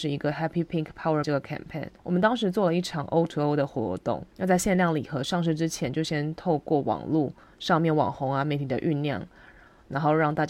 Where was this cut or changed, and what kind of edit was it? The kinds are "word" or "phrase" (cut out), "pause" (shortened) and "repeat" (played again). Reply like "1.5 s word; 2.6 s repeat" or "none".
1.2 s word; 2.0 s pause; 4.3 s pause; 7.4 s pause